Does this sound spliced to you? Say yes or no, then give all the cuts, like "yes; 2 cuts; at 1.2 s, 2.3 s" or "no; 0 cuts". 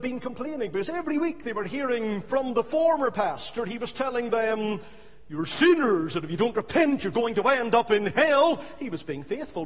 no; 0 cuts